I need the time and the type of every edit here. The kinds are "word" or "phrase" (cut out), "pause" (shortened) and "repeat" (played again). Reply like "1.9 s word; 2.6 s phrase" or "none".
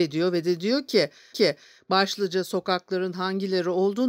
1.3 s repeat